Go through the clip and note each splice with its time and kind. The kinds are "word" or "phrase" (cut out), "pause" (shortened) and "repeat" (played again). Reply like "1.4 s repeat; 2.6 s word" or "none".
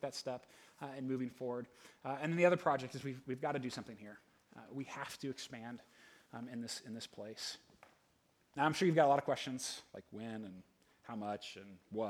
none